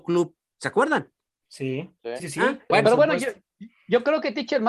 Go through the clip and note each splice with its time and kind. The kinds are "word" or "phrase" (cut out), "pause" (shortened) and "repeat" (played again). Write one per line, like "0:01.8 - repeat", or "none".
0:02.2 - word
0:02.7 - word